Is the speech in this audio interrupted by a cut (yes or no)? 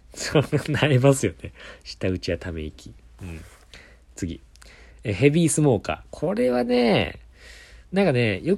no